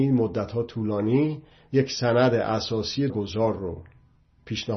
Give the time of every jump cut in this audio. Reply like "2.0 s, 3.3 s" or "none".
3.1 s